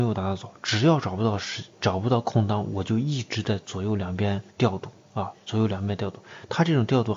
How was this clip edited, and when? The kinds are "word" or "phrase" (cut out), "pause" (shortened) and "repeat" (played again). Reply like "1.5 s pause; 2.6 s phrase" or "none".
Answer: 4.5 s pause